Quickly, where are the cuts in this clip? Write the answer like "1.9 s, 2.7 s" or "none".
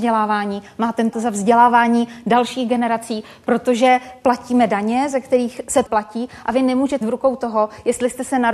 1.1 s, 5.9 s, 7.0 s